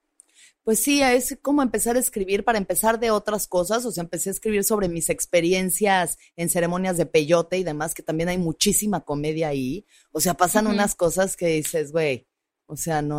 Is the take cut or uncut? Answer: uncut